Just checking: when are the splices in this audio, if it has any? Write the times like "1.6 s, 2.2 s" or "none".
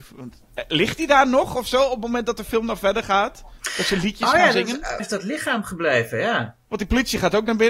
5.0 s